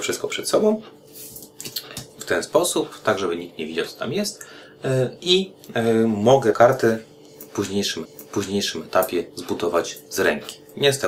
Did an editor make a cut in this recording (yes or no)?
yes